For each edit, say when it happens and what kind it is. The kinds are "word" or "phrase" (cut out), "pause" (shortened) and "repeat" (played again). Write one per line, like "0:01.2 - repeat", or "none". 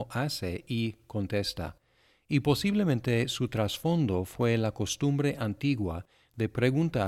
none